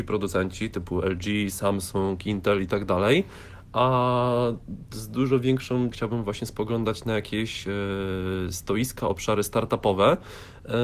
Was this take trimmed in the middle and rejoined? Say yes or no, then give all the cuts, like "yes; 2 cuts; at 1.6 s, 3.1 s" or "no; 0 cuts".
yes; 1 cut; at 5.9 s